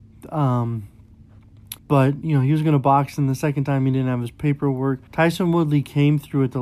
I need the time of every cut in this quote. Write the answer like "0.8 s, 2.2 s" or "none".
1.8 s, 5.1 s